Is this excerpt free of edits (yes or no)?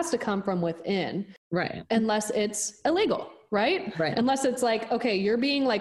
yes